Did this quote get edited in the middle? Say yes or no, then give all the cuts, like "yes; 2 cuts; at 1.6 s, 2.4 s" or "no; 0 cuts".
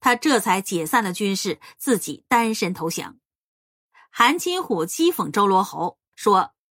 no; 0 cuts